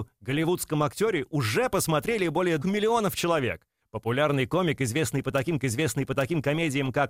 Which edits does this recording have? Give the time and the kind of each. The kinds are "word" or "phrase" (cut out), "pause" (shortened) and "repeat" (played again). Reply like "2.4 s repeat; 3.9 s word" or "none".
2.6 s word; 3.8 s pause; 5.6 s repeat